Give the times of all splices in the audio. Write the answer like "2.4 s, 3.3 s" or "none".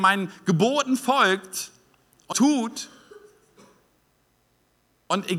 2.3 s